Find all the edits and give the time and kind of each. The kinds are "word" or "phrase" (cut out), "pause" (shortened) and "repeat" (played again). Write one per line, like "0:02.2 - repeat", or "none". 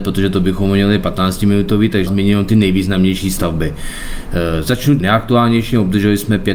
0:02.1 - word
0:05.0 - word